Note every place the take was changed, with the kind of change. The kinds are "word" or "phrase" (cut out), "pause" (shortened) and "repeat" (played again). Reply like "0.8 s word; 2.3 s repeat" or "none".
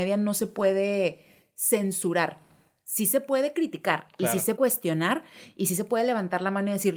4.6 s word